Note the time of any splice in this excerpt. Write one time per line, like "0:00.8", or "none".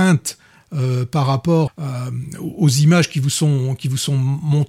0:01.7